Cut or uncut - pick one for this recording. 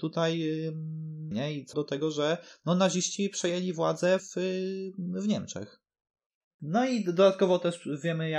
cut